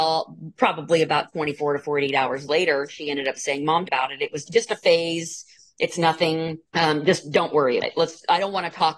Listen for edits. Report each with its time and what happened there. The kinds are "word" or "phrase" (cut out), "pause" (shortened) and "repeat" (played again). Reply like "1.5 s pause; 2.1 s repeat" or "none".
3.8 s phrase; 4.4 s word; 6.7 s pause; 7.8 s word